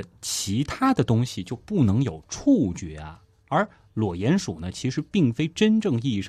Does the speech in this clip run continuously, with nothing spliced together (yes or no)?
yes